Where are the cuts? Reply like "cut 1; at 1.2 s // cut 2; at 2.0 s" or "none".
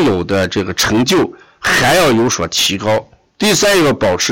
cut 1; at 3.3 s

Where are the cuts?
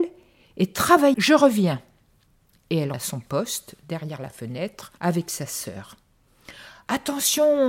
cut 1; at 1.1 s // cut 2; at 2.9 s // cut 3; at 5.0 s

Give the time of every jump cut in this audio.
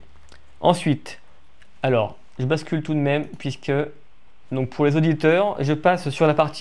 none

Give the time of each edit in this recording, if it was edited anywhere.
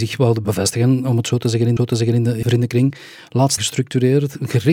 cut 1; at 1.8 s // cut 2; at 2.4 s // cut 3; at 3.6 s

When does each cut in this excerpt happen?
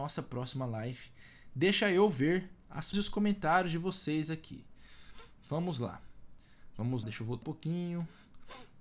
cut 1; at 2.9 s // cut 2; at 7.0 s // cut 3; at 7.4 s

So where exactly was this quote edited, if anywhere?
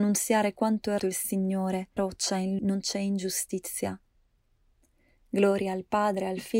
cut 1; at 1.0 s // cut 2; at 2.0 s // cut 3; at 2.6 s

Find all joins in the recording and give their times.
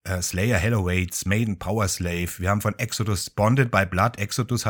none

